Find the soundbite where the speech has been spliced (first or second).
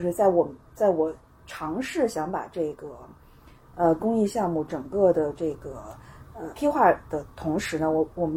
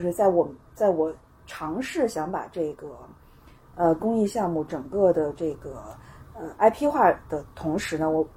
first